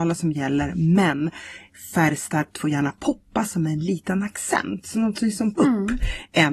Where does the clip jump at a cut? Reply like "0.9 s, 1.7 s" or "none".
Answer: 5.5 s